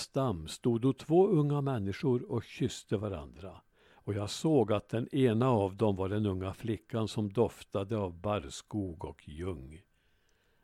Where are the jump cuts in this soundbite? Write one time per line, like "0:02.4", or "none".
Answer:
none